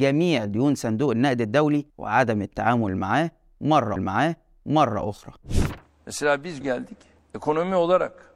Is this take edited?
yes; 3 cuts; at 1.9 s, 4.0 s, 6.6 s

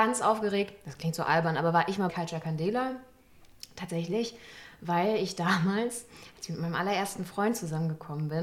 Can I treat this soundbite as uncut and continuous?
no; 1 cut; at 2.1 s

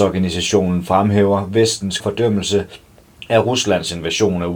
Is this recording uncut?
no; 1 cut; at 2.0 s

